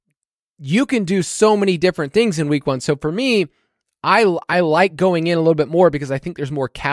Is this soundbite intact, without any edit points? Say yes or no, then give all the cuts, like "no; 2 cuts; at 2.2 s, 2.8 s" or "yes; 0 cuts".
yes; 0 cuts